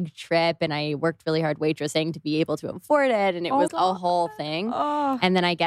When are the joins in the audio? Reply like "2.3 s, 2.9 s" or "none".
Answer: 3.7 s